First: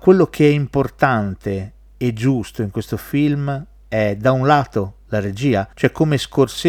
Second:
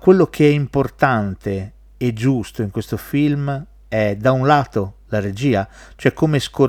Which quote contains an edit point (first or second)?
first